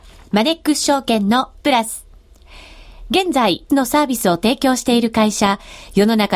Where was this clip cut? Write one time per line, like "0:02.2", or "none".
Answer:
0:01.6
0:03.7